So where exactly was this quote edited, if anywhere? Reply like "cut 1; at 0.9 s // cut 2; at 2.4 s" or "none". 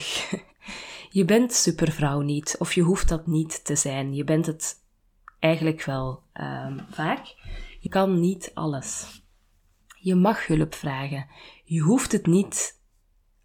cut 1; at 7.9 s